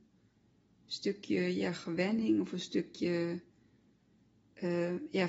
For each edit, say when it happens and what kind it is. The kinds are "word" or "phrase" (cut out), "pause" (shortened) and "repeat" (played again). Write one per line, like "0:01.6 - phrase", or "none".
none